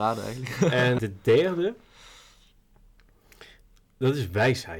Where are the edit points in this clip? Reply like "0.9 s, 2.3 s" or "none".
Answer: 1.0 s